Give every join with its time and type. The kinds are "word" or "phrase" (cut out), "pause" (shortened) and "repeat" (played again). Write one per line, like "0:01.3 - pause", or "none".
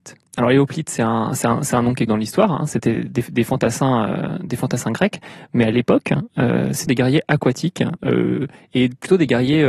0:02.1 - word
0:06.9 - word

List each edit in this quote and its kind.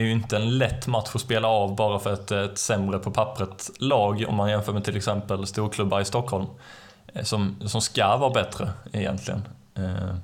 none

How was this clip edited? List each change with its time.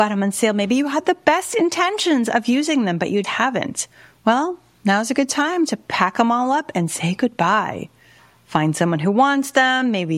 0:03.2 - word

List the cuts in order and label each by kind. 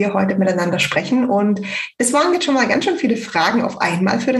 none

